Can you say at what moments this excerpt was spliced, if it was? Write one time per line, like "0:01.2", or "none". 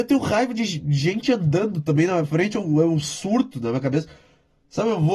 none